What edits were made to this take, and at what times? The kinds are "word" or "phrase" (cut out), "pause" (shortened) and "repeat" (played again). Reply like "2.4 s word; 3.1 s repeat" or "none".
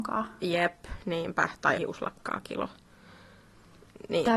1.7 s word